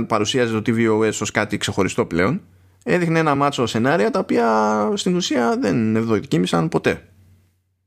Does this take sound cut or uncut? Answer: uncut